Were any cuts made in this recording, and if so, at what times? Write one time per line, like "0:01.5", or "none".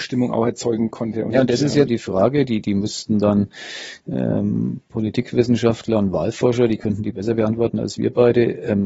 0:01.9